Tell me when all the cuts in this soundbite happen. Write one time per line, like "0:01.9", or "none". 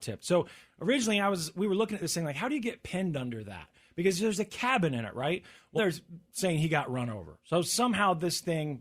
0:05.8